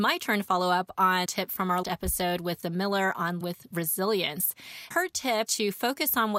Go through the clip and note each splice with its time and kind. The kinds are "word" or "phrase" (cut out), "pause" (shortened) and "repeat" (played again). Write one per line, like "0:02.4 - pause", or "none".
0:01.3 - word
0:01.8 - word
0:02.6 - word
0:03.4 - word
0:04.9 - word
0:05.5 - word